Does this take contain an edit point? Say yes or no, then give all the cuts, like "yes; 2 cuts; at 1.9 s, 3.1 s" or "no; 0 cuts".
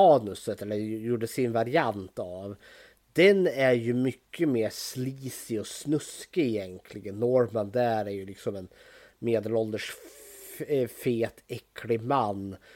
no; 0 cuts